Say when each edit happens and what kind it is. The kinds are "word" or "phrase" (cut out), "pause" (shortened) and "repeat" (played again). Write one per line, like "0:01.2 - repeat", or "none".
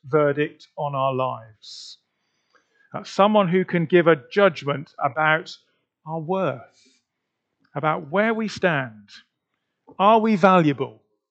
none